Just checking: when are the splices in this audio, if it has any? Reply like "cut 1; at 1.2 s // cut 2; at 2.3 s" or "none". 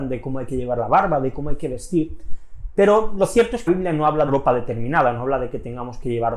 cut 1; at 3.7 s // cut 2; at 4.3 s